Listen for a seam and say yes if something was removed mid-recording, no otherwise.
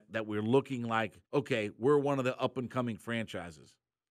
yes